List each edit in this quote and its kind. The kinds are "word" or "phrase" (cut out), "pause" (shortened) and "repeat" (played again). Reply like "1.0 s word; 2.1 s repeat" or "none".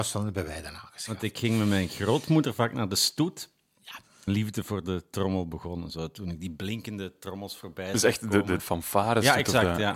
4.3 s phrase; 8.6 s word